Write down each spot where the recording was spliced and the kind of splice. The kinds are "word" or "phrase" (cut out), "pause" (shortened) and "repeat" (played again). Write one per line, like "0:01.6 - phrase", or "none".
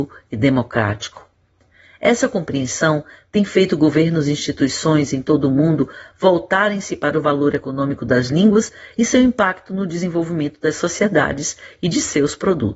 none